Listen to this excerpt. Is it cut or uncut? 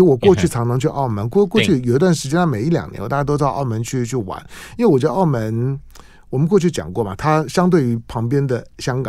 uncut